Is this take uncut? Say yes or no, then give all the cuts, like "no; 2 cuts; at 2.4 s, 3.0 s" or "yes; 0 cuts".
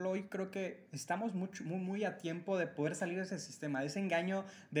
yes; 0 cuts